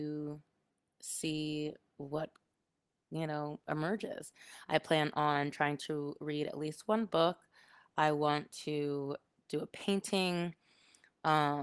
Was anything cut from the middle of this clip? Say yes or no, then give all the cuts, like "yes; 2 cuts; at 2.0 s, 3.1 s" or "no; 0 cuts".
no; 0 cuts